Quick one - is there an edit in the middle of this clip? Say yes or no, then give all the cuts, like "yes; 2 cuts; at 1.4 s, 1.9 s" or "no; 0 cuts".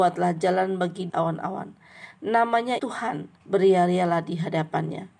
yes; 3 cuts; at 1.1 s, 2.8 s, 3.3 s